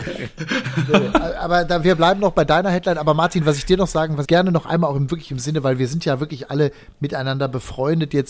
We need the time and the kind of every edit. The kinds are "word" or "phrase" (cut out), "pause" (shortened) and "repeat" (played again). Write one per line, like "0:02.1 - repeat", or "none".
0:04.2 - word